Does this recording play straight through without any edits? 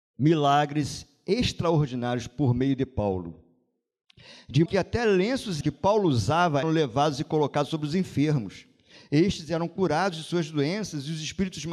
no; 3 cuts; at 4.7 s, 5.6 s, 6.6 s

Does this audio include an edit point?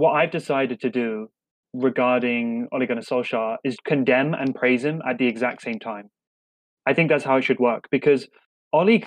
yes; 1 cut; at 3.8 s

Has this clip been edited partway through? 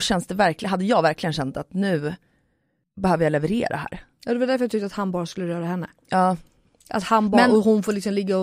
no; 0 cuts

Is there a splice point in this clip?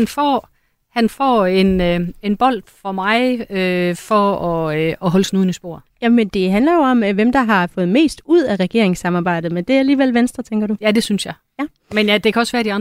no; 0 cuts

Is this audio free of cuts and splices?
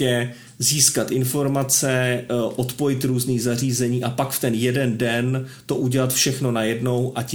yes; 0 cuts

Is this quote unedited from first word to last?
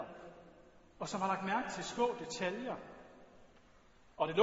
yes; 0 cuts

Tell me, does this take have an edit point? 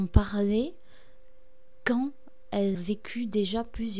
yes; 1 cut; at 2.7 s

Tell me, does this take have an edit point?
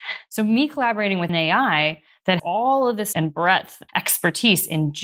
yes; 4 cuts; at 1.3 s, 2.4 s, 3.1 s, 3.9 s

